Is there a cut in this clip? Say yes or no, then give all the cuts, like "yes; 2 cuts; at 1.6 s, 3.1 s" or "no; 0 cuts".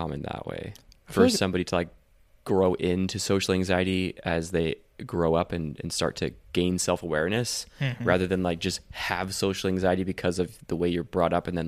no; 0 cuts